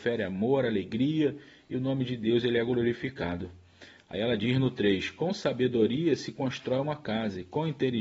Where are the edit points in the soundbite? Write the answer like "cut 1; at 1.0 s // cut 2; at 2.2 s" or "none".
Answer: none